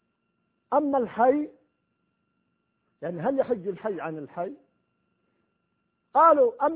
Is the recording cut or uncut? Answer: uncut